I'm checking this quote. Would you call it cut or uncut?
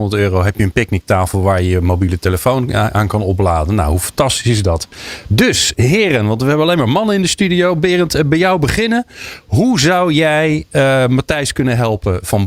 uncut